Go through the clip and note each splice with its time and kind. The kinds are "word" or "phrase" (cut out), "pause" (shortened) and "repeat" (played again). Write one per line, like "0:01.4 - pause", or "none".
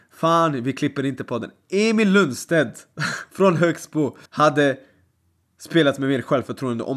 0:04.3 - pause